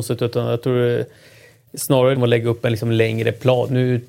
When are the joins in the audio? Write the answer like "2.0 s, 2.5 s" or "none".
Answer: 2.1 s